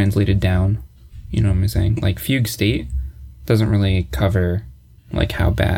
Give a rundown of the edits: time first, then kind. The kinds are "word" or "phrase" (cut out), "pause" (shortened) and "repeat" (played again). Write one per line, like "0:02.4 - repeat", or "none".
none